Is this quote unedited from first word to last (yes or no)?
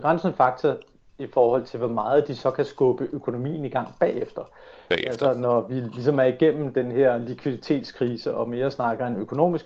yes